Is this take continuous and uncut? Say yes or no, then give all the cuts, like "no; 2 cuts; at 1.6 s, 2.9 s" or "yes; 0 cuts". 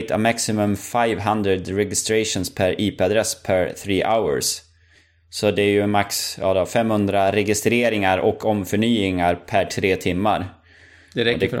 yes; 0 cuts